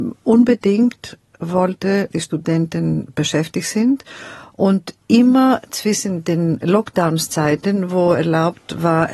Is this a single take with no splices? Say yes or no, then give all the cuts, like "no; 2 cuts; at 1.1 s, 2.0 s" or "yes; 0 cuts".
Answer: no; 1 cut; at 2.1 s